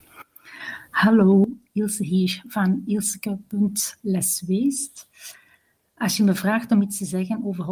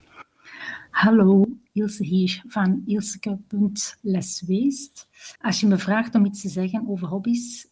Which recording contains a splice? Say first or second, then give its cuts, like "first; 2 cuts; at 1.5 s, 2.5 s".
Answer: second; 1 cut; at 5.4 s